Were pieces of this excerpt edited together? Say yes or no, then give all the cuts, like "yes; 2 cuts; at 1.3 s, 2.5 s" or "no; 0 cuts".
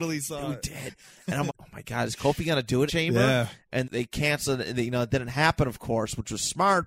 yes; 3 cuts; at 1.5 s, 2.9 s, 3.8 s